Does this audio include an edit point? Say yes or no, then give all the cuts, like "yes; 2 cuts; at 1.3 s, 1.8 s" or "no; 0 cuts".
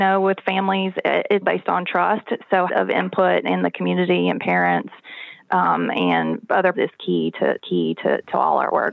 yes; 4 cuts; at 1.4 s, 2.7 s, 6.7 s, 7.6 s